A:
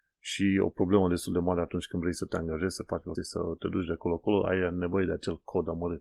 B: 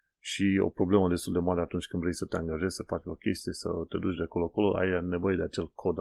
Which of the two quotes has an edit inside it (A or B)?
A